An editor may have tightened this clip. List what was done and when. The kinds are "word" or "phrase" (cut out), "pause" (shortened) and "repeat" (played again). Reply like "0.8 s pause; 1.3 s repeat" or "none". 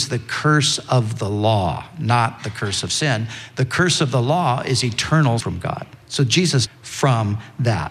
5.4 s word; 6.0 s pause; 6.7 s phrase